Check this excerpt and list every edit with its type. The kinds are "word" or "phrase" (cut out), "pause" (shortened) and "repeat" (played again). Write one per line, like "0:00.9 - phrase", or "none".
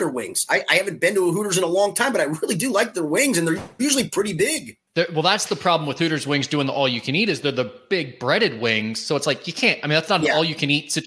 0:04.9 - pause